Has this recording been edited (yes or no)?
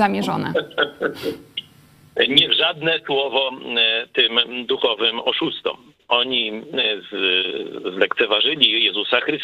yes